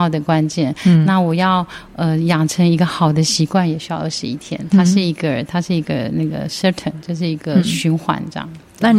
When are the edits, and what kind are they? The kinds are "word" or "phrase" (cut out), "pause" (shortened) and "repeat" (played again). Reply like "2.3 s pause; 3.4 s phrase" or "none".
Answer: none

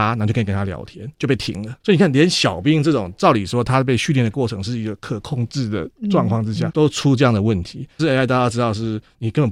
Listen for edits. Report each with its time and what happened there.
1.1 s pause; 1.8 s pause; 6.7 s word; 8.0 s phrase

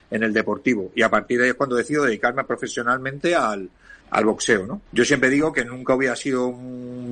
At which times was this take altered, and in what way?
4.0 s pause; 4.9 s pause

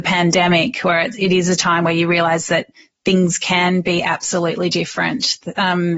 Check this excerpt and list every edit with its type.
none

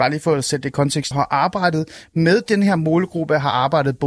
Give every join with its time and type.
1.1 s phrase

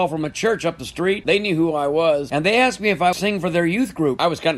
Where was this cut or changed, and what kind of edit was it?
3.1 s phrase

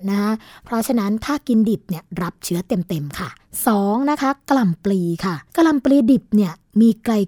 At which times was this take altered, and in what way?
3.4 s pause; 5.5 s pause

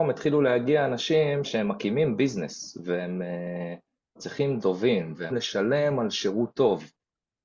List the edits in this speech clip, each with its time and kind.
1.4 s word; 4.6 s word; 5.3 s word

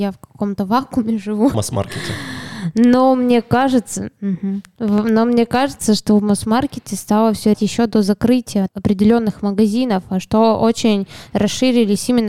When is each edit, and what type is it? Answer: 1.5 s word; 7.5 s phrase; 8.7 s word

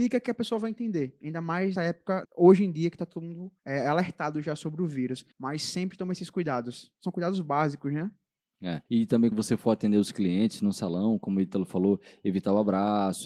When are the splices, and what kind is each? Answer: 1.8 s word; 2.2 s word; 3.6 s pause; 5.3 s pause; 8.9 s pause; 9.3 s word

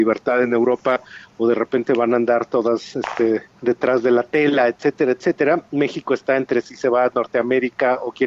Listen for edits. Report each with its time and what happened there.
3.5 s pause

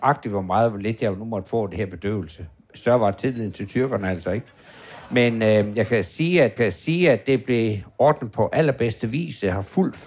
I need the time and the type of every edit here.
6.6 s repeat

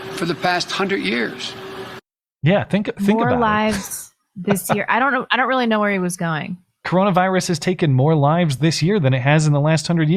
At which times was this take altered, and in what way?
none

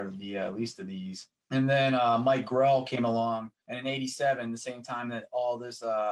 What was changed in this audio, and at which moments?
1.4 s pause; 3.6 s pause

